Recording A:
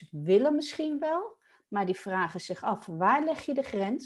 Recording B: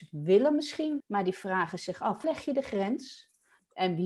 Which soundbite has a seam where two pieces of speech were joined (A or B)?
B